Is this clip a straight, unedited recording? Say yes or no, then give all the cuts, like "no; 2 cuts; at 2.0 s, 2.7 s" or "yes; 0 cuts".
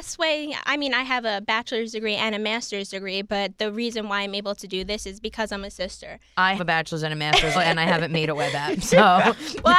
no; 2 cuts; at 6.6 s, 7.5 s